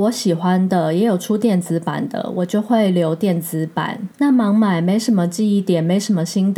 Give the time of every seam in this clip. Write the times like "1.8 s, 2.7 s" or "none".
4.1 s